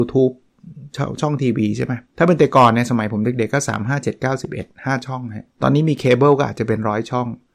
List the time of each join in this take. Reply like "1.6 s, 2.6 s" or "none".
2.1 s, 5.5 s